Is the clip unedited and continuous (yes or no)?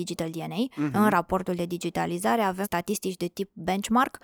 no